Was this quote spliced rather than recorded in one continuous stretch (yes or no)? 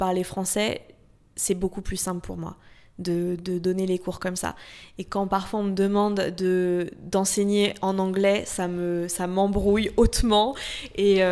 no